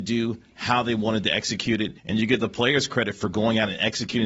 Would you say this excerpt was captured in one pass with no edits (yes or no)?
no